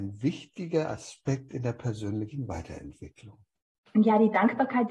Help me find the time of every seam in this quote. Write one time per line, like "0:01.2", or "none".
none